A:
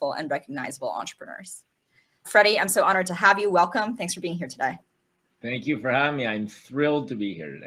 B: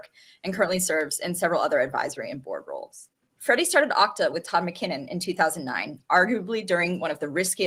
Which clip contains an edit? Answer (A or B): B